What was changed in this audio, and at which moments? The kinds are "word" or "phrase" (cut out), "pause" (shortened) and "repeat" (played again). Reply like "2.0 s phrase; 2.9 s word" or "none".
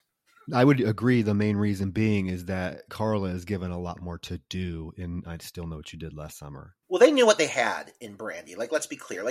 6.8 s pause